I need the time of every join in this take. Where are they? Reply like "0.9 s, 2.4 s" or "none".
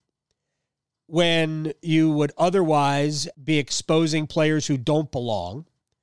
3.3 s